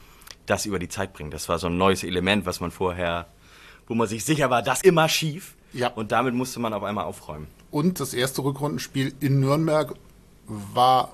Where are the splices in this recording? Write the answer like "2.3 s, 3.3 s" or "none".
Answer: 4.8 s